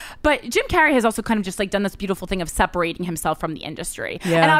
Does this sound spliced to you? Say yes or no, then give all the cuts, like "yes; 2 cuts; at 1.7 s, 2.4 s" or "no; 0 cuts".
no; 0 cuts